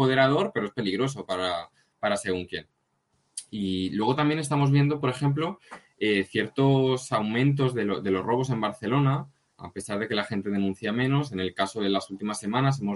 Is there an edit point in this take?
no; 0 cuts

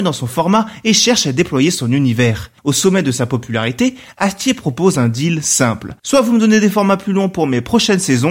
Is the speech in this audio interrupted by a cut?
no; 0 cuts

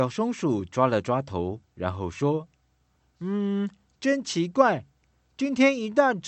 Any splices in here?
no; 0 cuts

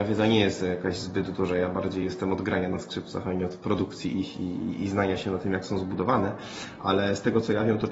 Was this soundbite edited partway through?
no; 0 cuts

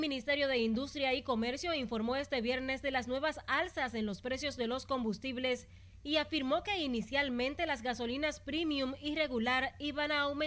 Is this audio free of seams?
yes; 0 cuts

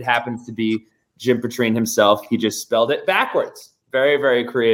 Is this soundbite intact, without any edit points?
yes; 0 cuts

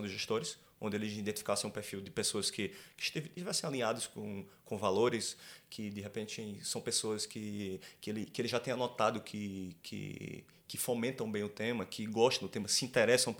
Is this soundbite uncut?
yes; 0 cuts

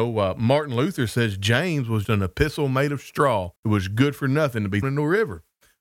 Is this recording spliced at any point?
yes; 3 cuts; at 2.0 s, 3.6 s, 4.8 s

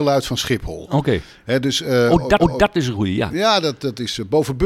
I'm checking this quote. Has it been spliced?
yes; 1 cut; at 2.4 s

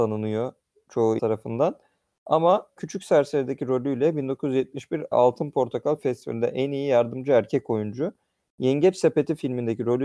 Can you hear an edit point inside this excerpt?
yes; 4 cuts; at 1.2 s, 2.8 s, 5.1 s, 6.0 s

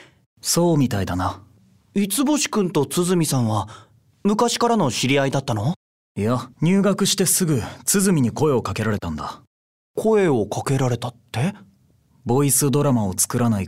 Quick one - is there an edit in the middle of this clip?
yes; 1 cut; at 6.5 s

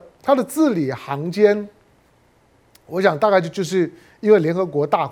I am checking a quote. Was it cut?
no; 0 cuts

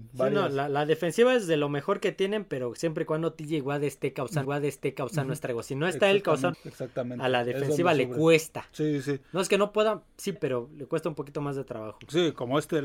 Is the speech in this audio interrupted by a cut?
yes; 3 cuts; at 4.4 s, 6.5 s, 10.4 s

